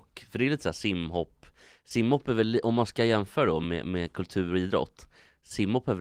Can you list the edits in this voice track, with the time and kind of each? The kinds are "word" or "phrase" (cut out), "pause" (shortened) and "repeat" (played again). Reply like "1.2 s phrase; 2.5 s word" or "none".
none